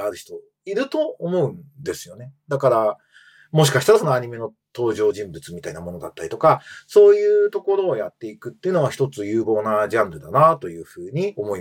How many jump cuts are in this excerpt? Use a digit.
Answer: 0